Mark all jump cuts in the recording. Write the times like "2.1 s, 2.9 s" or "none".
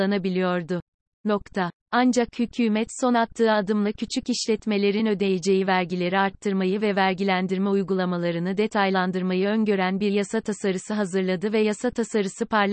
none